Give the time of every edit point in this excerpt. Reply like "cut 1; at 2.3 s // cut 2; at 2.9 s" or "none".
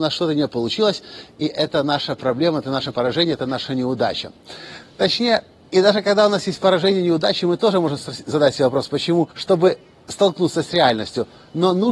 cut 1; at 9.3 s